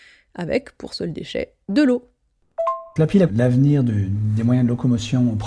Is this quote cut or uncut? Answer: cut